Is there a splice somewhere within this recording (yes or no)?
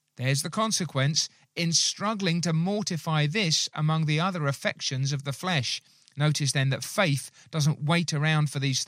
no